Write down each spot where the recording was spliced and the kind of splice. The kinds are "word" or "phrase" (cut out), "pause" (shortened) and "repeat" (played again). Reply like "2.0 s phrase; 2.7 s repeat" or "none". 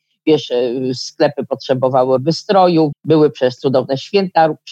2.2 s word; 2.9 s word